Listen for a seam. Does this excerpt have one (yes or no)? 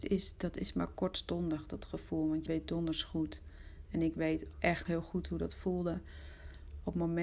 yes